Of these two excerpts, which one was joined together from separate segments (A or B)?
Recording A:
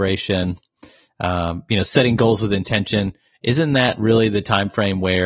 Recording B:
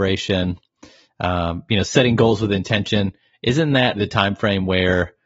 B